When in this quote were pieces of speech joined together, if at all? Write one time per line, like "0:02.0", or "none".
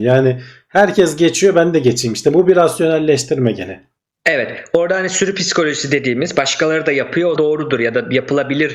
0:07.4

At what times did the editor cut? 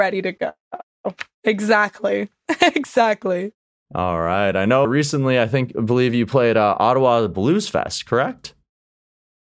0:04.8

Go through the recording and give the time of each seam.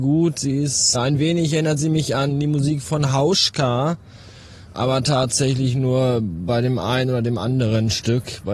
0:00.9

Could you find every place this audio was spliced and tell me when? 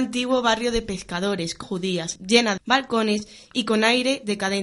0:01.6
0:02.2
0:02.6

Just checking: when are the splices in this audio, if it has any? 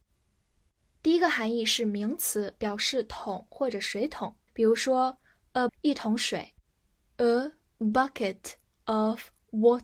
0:04.5
0:05.7

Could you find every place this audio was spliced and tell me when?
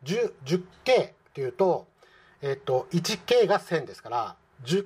none

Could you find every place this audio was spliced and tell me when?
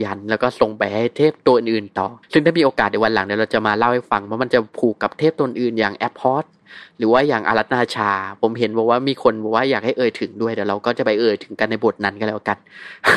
0:02.2

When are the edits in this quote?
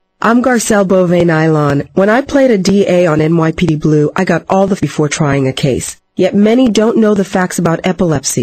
0:04.8
0:06.1

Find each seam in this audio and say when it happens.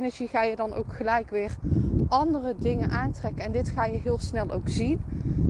none

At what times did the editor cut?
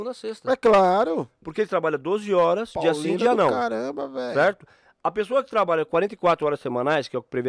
none

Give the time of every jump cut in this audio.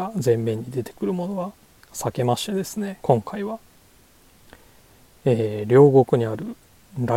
0:03.0

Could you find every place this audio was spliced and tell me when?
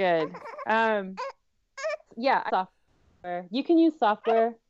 0:02.1
0:02.5

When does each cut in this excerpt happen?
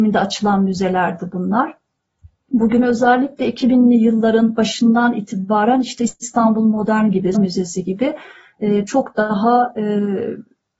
0:07.3

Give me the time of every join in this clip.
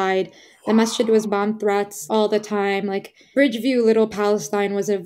0:01.2
0:02.1
0:03.3

